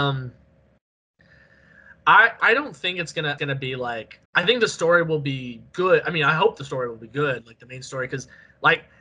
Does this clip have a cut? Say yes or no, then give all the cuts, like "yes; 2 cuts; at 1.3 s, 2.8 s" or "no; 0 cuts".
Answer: yes; 3 cuts; at 2.4 s, 3.4 s, 4.3 s